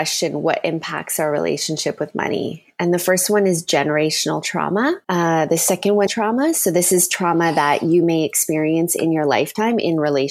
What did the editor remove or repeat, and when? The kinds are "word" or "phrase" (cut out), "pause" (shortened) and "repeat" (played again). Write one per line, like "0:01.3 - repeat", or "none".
0:05.0 - pause
0:06.1 - phrase